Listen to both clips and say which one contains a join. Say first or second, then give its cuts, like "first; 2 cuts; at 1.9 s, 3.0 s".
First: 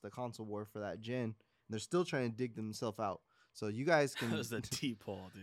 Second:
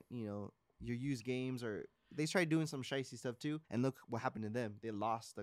second; 1 cut; at 3.6 s